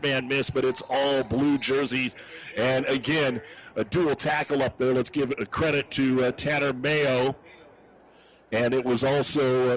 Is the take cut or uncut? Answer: cut